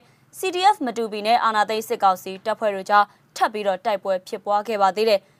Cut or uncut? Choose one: uncut